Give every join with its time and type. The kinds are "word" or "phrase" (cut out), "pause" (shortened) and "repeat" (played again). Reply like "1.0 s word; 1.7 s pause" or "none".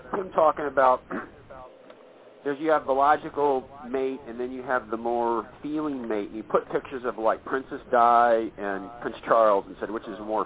none